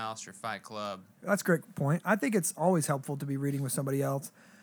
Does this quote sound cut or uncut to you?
uncut